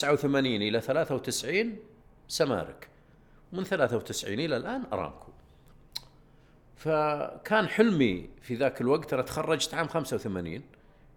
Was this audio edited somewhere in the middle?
no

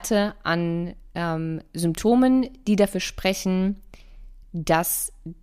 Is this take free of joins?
yes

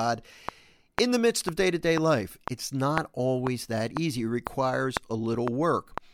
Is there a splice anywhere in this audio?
no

